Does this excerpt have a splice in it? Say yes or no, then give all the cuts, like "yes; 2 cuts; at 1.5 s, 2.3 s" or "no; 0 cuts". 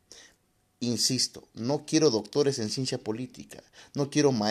no; 0 cuts